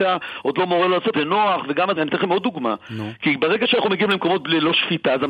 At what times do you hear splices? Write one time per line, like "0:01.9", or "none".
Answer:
0:01.1
0:02.0